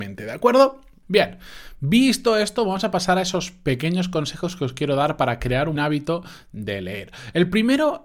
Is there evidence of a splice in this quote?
yes; 1 cut; at 5.8 s

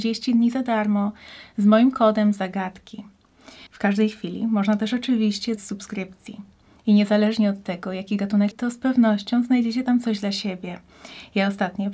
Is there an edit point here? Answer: yes; 3 cuts; at 3.7 s, 5.6 s, 8.5 s

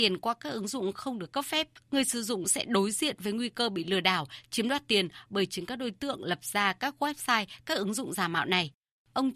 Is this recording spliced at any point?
no; 0 cuts

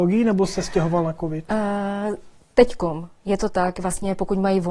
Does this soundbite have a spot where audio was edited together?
no; 0 cuts

